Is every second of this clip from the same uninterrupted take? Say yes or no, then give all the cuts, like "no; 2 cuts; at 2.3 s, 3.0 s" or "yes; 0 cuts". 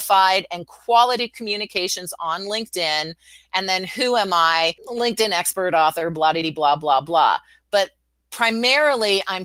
no; 1 cut; at 4.8 s